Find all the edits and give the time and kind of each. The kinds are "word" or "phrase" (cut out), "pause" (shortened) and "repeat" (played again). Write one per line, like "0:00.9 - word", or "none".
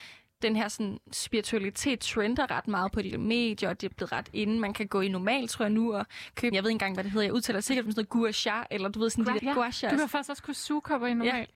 0:03.1 - word
0:06.5 - word
0:07.9 - word
0:09.4 - word